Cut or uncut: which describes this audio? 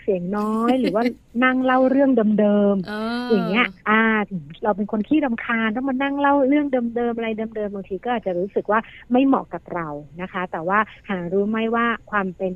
cut